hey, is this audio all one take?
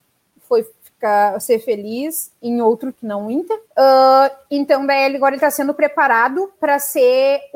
no; 3 cuts; at 2.4 s, 2.9 s, 3.6 s

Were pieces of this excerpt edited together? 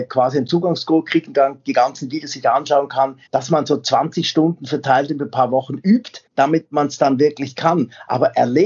yes; 2 cuts; at 3.3 s, 6.3 s

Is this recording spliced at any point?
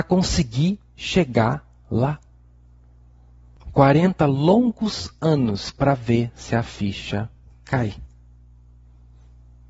no; 0 cuts

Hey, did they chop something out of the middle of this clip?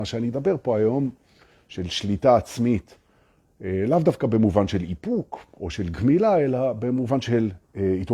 no; 0 cuts

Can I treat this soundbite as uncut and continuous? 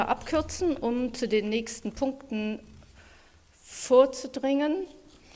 yes; 0 cuts

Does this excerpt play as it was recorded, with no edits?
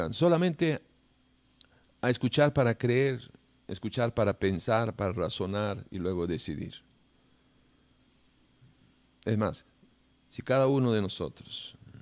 no; 1 cut; at 10.1 s

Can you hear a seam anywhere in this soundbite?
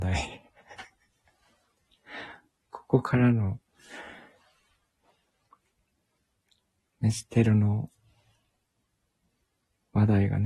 no; 0 cuts

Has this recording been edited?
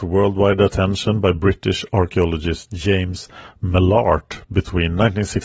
no; 0 cuts

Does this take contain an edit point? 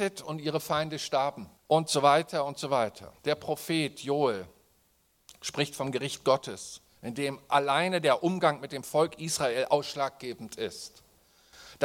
yes; 2 cuts; at 1.6 s, 3.2 s

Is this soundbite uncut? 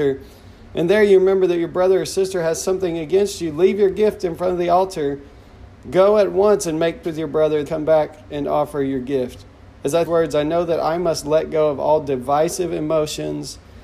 no; 4 cuts; at 7.0 s, 7.6 s, 9.6 s, 10.0 s

